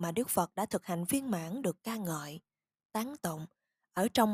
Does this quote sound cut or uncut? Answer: uncut